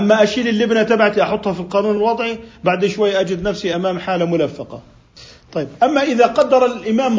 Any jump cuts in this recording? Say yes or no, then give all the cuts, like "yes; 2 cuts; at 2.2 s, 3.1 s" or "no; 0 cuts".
no; 0 cuts